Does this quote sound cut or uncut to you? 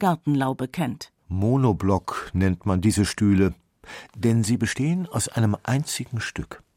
cut